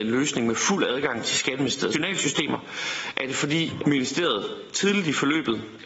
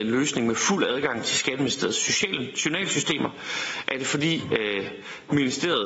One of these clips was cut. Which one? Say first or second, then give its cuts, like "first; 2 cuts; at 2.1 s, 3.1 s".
first; 2 cuts; at 1.9 s, 3.8 s